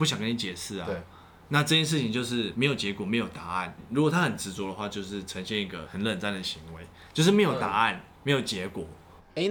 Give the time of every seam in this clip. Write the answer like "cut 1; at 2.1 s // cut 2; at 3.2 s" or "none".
none